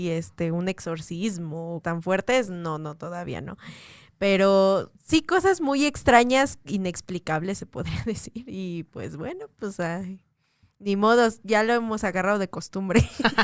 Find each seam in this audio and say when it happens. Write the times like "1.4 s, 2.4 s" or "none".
1.8 s